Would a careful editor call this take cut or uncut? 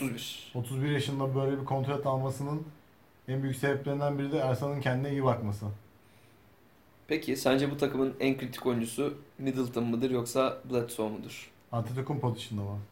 uncut